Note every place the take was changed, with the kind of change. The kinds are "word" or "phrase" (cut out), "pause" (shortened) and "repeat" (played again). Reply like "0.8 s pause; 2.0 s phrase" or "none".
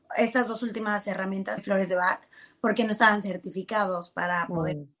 1.6 s word

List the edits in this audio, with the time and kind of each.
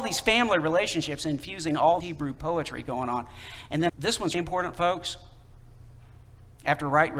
2.0 s word; 3.9 s word; 4.3 s word

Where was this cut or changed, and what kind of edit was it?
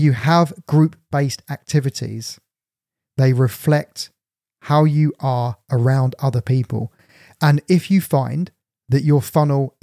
none

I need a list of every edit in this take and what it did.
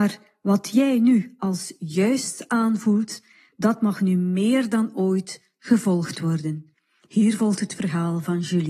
none

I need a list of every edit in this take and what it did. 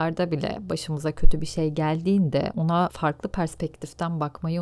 none

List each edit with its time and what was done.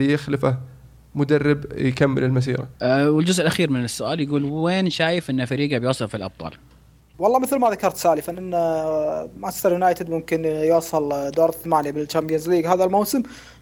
2.8 s pause

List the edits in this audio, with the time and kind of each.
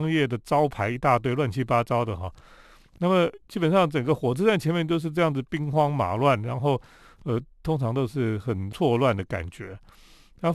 none

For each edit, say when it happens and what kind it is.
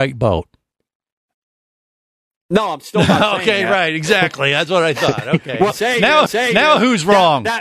5.7 s word; 6.3 s repeat

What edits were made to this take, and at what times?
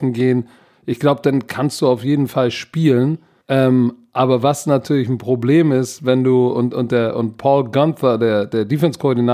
3.4 s pause

